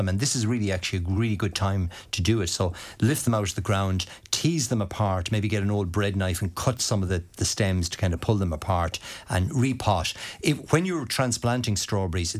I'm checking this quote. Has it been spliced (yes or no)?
no